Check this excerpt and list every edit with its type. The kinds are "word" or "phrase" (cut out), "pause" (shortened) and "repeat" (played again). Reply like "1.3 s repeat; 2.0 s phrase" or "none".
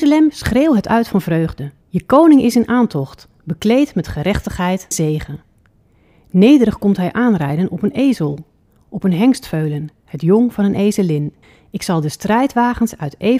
1.8 s pause; 4.9 s word; 11.4 s pause